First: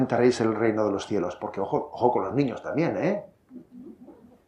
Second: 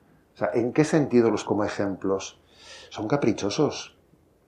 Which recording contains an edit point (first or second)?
second